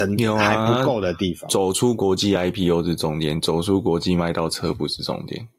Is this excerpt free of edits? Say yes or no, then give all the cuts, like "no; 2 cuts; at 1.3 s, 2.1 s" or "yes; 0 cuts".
yes; 0 cuts